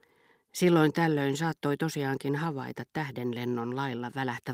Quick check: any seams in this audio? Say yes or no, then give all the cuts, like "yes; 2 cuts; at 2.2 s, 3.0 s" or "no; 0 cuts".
no; 0 cuts